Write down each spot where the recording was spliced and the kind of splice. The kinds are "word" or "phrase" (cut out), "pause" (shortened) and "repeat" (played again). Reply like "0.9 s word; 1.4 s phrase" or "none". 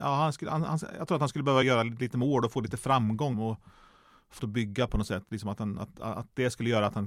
1.6 s word; 3.3 s word; 4.4 s word; 4.9 s word